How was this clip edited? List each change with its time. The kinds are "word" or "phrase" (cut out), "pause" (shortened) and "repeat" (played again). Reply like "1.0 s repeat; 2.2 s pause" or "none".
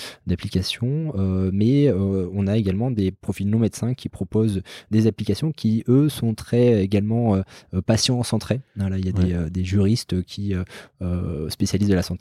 none